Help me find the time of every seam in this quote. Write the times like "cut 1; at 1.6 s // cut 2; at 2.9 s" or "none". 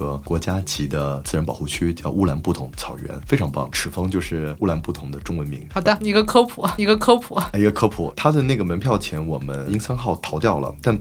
cut 1; at 6.8 s